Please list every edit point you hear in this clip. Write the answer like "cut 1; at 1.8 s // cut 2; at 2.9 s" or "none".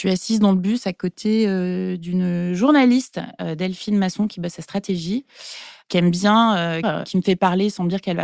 cut 1; at 6.8 s